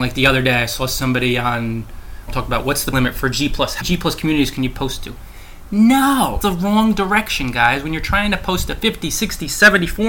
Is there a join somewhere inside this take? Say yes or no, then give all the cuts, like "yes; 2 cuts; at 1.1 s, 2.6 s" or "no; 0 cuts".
yes; 4 cuts; at 2.3 s, 2.9 s, 3.8 s, 6.4 s